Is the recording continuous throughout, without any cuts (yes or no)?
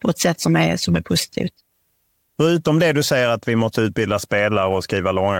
yes